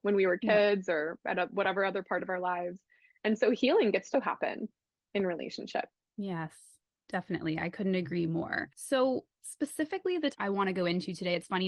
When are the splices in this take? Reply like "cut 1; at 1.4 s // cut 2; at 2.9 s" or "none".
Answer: cut 1; at 4.1 s // cut 2; at 10.3 s